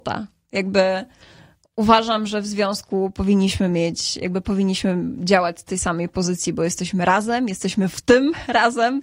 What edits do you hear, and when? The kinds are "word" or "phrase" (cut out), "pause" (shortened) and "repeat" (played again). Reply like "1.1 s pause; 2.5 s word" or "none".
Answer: none